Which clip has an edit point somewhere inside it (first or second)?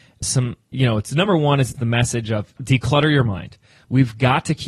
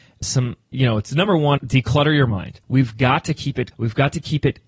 second